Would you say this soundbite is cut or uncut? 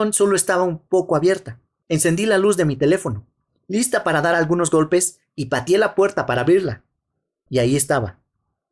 uncut